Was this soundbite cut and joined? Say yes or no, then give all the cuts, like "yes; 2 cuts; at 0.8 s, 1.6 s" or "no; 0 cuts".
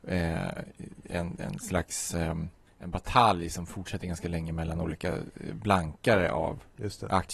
no; 0 cuts